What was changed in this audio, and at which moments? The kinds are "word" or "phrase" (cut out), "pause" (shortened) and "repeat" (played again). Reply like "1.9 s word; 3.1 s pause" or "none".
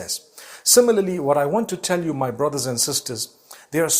none